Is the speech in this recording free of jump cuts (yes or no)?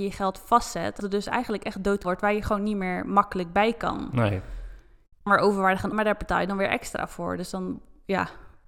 no